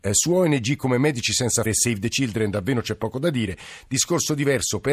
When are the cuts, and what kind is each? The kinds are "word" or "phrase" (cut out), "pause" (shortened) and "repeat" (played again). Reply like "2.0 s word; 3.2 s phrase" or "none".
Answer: 1.7 s word